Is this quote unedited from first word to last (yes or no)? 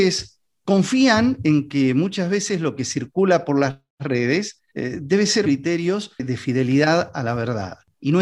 no